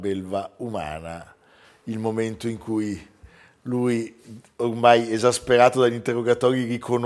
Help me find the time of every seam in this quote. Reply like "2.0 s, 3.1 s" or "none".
none

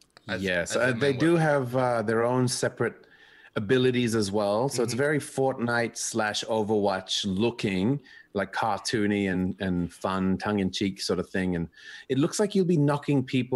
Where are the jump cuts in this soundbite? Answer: none

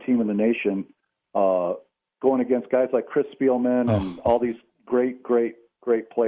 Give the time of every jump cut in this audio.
none

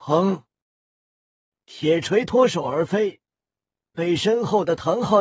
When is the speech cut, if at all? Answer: none

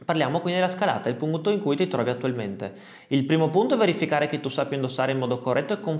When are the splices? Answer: none

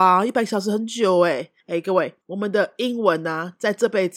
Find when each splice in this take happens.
1.6 s, 2.2 s

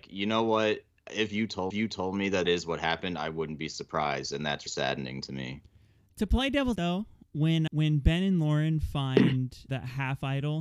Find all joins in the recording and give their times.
1.7 s, 2.5 s, 4.7 s, 6.8 s, 7.7 s, 9.7 s

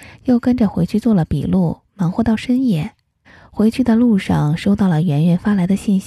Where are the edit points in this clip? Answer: 3.2 s

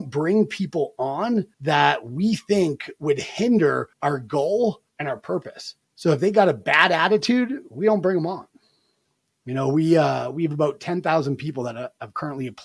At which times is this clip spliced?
1.5 s, 3.9 s, 4.9 s, 5.8 s

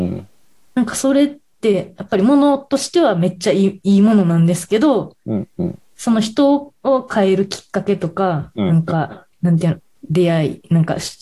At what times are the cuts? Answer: 1.5 s, 9.3 s

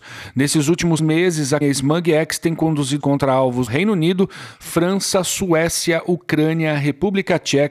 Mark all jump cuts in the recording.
1.0 s, 1.6 s, 3.0 s, 3.7 s

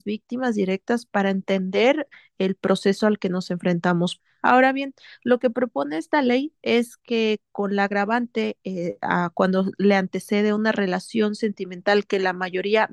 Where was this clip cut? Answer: none

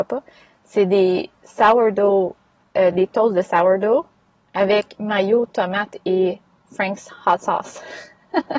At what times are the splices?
2.9 s

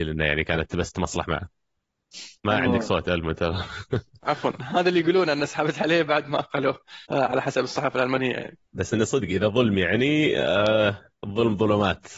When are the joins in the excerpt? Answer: 2.4 s, 7.1 s, 8.7 s, 11.2 s

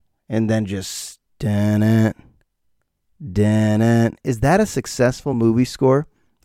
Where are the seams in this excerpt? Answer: none

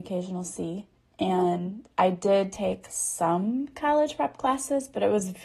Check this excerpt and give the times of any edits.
1.0 s, 2.9 s

